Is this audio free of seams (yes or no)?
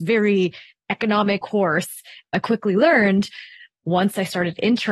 no